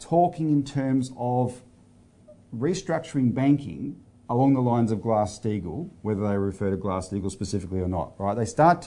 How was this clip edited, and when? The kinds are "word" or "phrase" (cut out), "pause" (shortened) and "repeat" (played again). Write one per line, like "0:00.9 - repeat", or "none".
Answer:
none